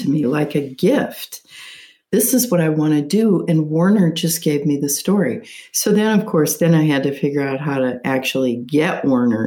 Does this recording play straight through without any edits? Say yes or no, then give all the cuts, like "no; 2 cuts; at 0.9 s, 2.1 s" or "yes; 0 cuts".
yes; 0 cuts